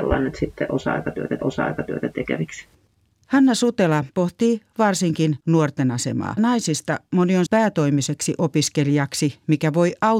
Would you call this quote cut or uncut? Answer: cut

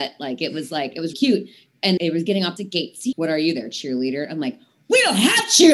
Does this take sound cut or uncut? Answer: cut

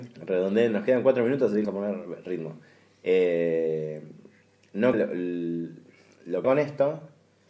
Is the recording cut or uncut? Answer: cut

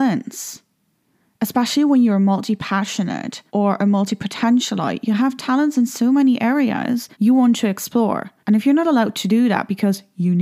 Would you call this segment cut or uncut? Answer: cut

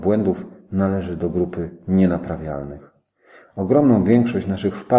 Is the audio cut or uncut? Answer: uncut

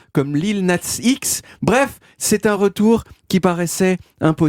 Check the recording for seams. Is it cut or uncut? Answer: uncut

